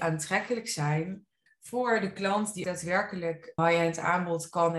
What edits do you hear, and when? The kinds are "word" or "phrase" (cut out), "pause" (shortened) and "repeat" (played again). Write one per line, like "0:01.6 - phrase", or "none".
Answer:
0:01.5 - pause
0:02.6 - word
0:03.6 - word